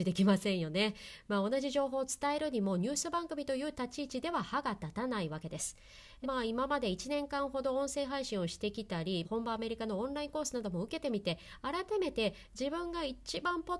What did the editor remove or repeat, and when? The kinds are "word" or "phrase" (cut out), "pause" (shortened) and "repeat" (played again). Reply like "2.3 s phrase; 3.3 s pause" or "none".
6.2 s phrase; 9.2 s phrase